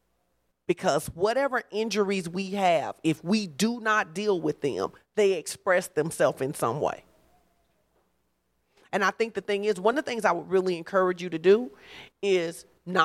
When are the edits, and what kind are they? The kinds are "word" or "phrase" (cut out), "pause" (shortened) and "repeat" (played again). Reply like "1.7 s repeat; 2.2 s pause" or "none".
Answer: none

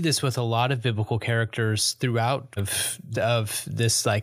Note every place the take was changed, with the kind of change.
2.6 s word; 3.1 s phrase

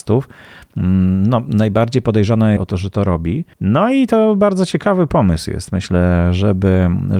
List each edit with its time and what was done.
2.6 s phrase; 3.5 s pause

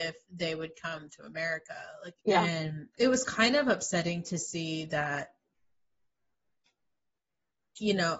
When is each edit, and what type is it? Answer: 2.2 s pause; 2.9 s pause

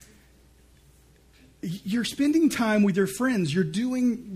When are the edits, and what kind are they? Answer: none

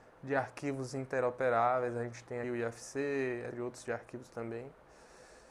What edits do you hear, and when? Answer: 2.4 s word; 3.5 s word; 3.8 s word

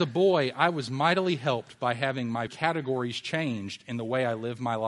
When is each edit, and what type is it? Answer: 2.5 s word

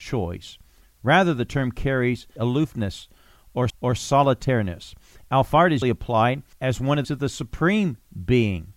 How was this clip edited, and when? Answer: 2.4 s phrase; 3.7 s repeat; 5.8 s word; 6.5 s pause; 7.0 s phrase

